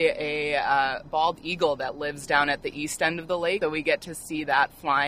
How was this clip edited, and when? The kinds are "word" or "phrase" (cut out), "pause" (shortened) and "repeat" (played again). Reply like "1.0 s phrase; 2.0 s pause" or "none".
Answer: 3.6 s word